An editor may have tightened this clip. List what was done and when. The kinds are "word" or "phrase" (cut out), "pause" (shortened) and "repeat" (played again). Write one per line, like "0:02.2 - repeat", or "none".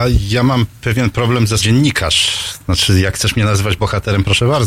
0:01.6 - word